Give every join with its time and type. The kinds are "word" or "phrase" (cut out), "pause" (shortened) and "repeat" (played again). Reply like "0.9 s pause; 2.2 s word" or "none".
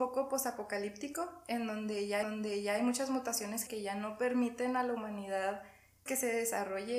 2.2 s repeat; 3.7 s word; 6.1 s word